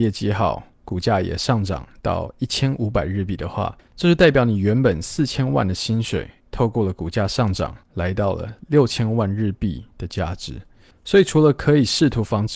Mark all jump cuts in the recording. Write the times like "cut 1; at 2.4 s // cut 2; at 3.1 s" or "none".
cut 1; at 3.8 s // cut 2; at 6.4 s // cut 3; at 7.8 s // cut 4; at 10.9 s